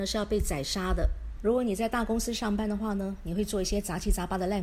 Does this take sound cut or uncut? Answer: cut